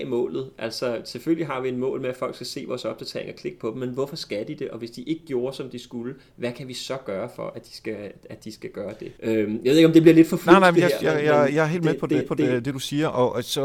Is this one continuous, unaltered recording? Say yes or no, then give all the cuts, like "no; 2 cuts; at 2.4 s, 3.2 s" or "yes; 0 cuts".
no; 1 cut; at 12.2 s